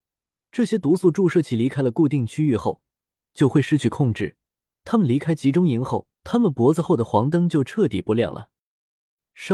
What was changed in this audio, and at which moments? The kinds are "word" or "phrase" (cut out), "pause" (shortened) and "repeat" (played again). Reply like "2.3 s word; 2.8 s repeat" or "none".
6.2 s pause